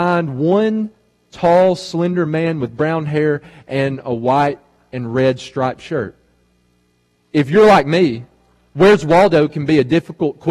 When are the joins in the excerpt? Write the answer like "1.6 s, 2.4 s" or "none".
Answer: none